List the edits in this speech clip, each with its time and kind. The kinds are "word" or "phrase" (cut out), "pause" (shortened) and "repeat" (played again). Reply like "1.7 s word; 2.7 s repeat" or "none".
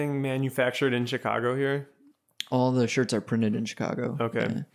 none